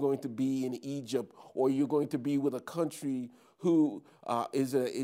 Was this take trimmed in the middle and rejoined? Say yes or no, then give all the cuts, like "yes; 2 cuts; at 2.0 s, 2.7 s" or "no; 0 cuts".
no; 0 cuts